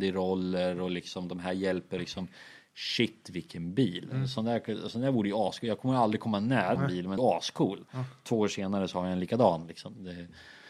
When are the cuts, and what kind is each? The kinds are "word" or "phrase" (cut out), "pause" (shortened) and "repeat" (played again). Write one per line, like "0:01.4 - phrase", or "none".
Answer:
0:02.0 - phrase
0:06.8 - phrase
0:07.2 - phrase